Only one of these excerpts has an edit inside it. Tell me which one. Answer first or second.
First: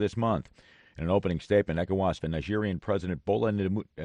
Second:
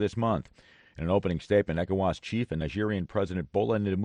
first